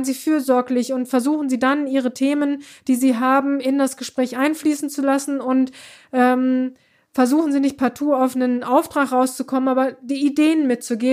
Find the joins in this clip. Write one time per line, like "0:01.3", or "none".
none